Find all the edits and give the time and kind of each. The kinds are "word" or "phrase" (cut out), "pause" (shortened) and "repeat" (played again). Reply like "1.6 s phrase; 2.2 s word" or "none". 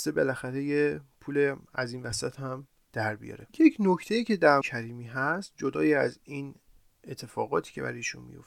4.6 s phrase